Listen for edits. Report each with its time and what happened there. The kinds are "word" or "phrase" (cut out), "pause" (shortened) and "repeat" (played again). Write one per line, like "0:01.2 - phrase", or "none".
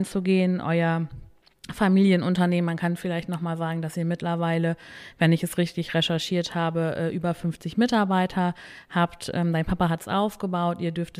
none